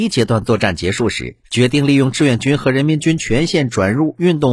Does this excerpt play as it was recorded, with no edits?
no; 1 cut; at 1.4 s

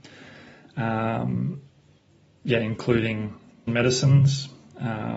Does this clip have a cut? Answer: yes; 1 cut; at 3.7 s

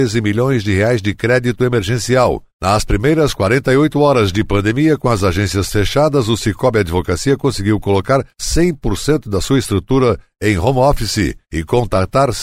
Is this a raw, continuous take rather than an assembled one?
yes; 0 cuts

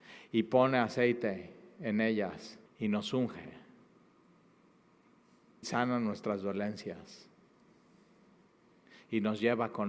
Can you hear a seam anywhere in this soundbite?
yes; 2 cuts; at 2.7 s, 5.6 s

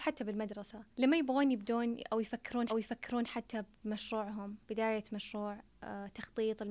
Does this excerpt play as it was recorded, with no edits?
no; 3 cuts; at 0.9 s, 2.7 s, 4.6 s

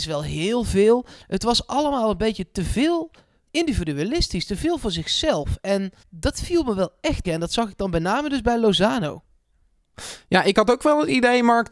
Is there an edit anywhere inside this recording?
yes; 3 cuts; at 3.4 s, 6.0 s, 7.2 s

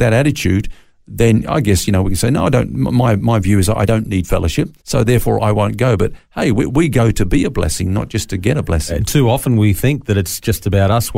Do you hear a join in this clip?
yes; 1 cut; at 4.8 s

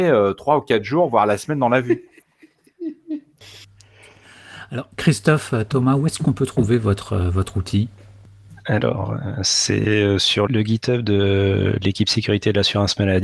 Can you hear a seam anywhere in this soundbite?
yes; 2 cuts; at 4.9 s, 10.5 s

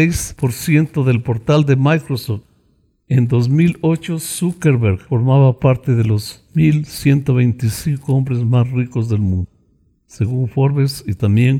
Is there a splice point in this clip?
no; 0 cuts

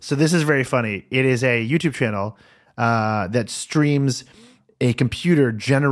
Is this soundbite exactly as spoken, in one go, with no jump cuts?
yes; 0 cuts

